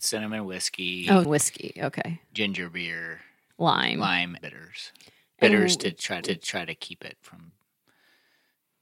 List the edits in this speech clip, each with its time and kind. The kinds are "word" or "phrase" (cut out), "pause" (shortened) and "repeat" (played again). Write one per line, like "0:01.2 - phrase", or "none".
0:01.2 - word
0:03.5 - word
0:04.4 - word
0:06.2 - repeat